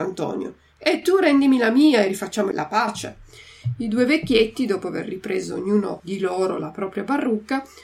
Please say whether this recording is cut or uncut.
uncut